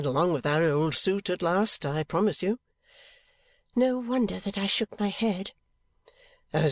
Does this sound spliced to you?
no; 0 cuts

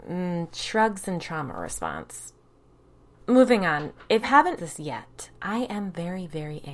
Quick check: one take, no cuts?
no; 2 cuts; at 4.2 s, 4.6 s

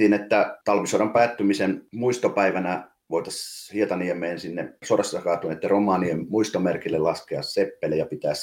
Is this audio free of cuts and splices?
yes; 0 cuts

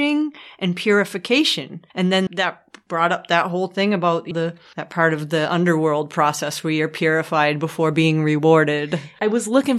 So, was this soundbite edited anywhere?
yes; 3 cuts; at 1.9 s, 2.3 s, 4.3 s

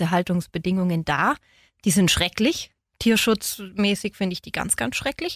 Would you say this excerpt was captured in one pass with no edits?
yes; 0 cuts

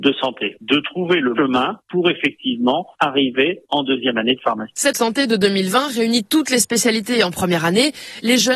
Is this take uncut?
no; 2 cuts; at 1.4 s, 4.9 s

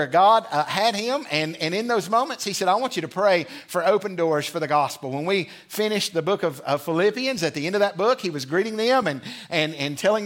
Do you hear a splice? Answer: no; 0 cuts

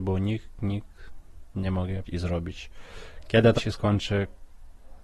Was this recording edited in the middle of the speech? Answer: yes; 3 cuts; at 1.5 s, 2.1 s, 3.6 s

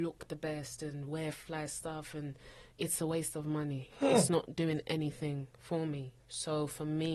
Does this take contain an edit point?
yes; 2 cuts; at 2.7 s, 6.2 s

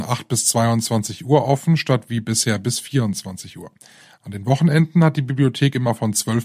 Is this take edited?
no; 0 cuts

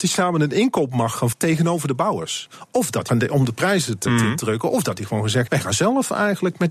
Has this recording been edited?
yes; 4 cuts; at 1.3 s, 3.1 s, 4.1 s, 5.5 s

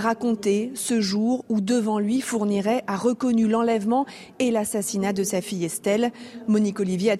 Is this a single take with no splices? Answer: yes; 0 cuts

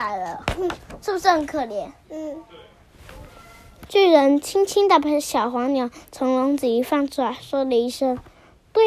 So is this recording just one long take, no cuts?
yes; 0 cuts

